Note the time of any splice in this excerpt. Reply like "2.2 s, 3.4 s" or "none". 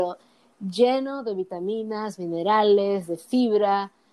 none